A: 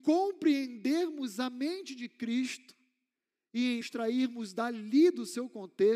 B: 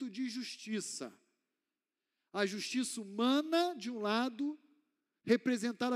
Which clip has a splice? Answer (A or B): A